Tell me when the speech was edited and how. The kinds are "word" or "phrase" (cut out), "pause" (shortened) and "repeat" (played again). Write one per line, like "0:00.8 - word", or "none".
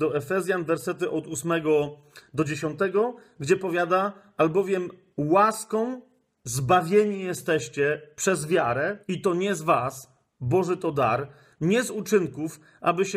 0:09.0 - pause